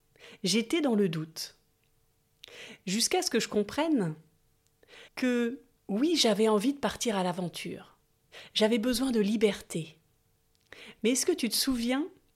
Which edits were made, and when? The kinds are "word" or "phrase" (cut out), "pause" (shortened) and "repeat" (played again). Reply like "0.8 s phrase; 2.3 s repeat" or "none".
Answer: 5.1 s pause